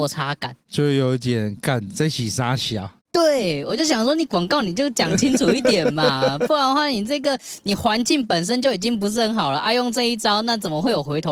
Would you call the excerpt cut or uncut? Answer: uncut